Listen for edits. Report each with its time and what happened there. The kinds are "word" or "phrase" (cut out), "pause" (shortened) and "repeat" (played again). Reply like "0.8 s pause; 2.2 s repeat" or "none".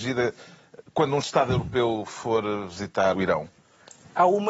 1.2 s word; 3.1 s word